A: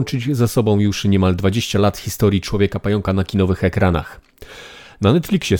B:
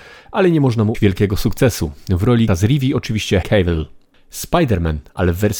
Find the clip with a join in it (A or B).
B